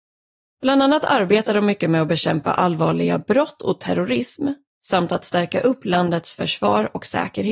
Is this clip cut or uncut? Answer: uncut